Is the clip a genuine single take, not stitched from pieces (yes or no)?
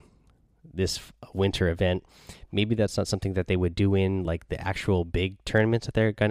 yes